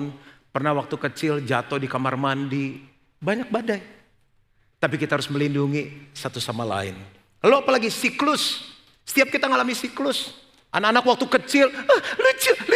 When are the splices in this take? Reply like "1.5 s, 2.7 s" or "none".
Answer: none